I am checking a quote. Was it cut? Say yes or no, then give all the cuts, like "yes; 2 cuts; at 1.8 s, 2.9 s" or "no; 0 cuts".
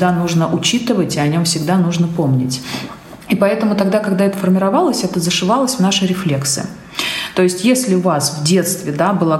no; 0 cuts